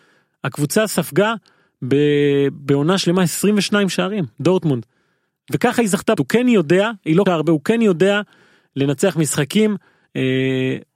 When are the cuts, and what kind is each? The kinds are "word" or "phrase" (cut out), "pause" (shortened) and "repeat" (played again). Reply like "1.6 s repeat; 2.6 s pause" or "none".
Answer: 6.2 s word; 7.3 s word